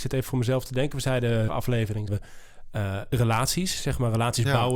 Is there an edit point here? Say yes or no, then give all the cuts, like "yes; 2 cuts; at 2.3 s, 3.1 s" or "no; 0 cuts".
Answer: yes; 3 cuts; at 1.5 s, 2.1 s, 3.1 s